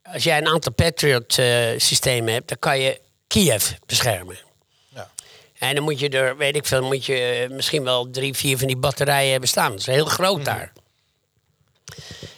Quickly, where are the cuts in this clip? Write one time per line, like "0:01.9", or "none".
none